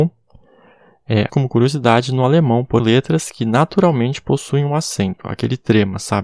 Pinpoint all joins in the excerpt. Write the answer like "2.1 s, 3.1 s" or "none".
1.3 s, 2.8 s